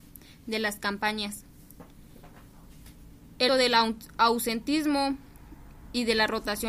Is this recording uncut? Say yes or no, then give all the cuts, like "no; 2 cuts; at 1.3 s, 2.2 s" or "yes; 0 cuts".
no; 1 cut; at 3.5 s